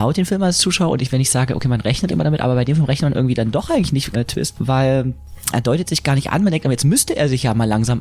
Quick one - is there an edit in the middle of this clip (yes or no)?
yes